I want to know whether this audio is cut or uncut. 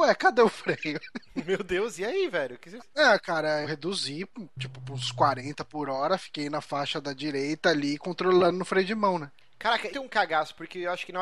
cut